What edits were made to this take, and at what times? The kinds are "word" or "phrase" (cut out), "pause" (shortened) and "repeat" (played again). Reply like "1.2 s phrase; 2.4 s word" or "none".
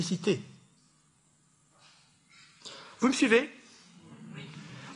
none